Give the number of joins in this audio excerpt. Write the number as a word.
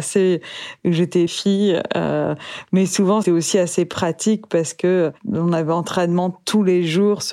two